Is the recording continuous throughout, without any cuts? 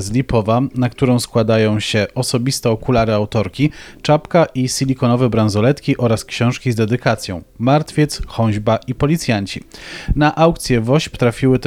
yes; 0 cuts

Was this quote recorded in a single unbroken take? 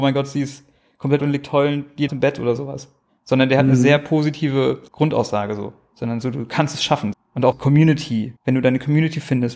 no; 6 cuts; at 1.2 s, 2.1 s, 4.9 s, 7.1 s, 7.5 s, 8.4 s

